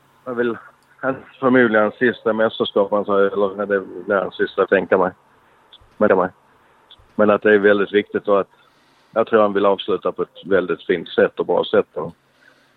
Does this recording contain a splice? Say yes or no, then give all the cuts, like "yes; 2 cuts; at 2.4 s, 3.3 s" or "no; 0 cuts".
yes; 2 cuts; at 4.7 s, 6.1 s